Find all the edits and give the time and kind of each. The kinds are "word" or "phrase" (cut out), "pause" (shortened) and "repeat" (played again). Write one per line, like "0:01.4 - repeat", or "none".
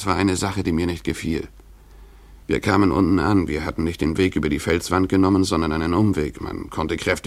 0:02.4 - pause